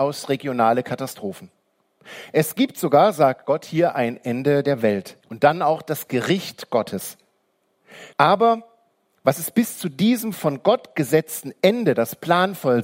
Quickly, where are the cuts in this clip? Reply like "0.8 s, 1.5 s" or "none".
5.2 s, 8.1 s